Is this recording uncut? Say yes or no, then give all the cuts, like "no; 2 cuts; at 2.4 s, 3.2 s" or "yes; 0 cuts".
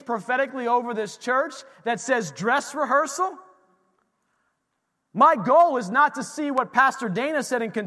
yes; 0 cuts